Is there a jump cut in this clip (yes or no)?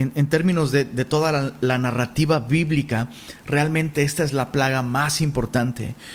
no